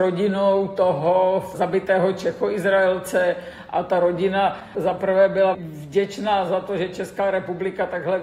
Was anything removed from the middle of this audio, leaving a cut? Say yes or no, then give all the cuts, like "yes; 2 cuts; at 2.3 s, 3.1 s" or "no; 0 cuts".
yes; 1 cut; at 5.5 s